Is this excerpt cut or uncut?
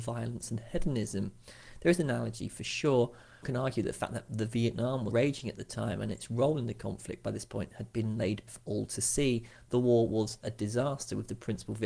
cut